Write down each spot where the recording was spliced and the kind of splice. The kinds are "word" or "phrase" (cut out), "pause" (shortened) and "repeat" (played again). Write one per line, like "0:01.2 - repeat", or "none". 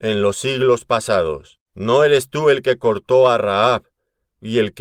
0:01.7 - pause